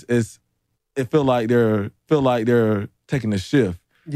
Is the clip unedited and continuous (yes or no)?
no